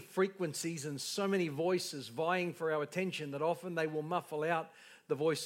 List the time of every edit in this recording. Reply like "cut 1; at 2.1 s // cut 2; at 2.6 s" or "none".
none